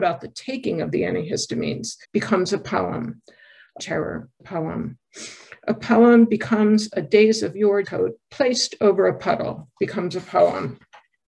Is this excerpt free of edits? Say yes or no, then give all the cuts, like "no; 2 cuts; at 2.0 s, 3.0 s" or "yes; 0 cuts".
no; 4 cuts; at 2.0 s, 3.8 s, 4.4 s, 7.8 s